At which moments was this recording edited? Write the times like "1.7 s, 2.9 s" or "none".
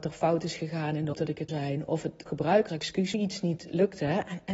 1.1 s, 1.5 s, 2.3 s, 2.7 s, 3.1 s